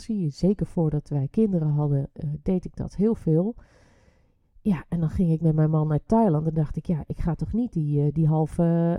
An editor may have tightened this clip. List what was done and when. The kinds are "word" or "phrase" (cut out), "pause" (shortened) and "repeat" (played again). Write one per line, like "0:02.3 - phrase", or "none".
none